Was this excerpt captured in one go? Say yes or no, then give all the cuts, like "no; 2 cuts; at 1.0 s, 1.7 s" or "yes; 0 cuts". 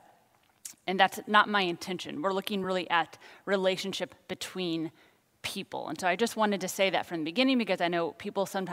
yes; 0 cuts